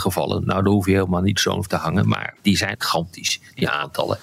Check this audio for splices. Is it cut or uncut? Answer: cut